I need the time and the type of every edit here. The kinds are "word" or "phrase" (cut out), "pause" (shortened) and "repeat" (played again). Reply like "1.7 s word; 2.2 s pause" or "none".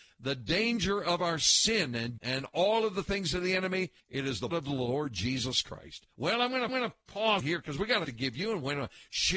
2.2 s word; 4.0 s pause; 4.5 s word; 6.1 s pause; 6.7 s repeat; 7.4 s word; 8.0 s word